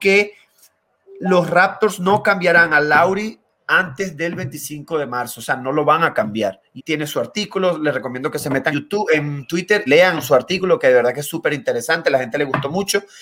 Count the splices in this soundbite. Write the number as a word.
three